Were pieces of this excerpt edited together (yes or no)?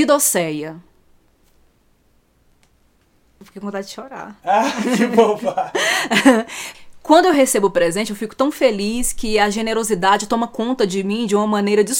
no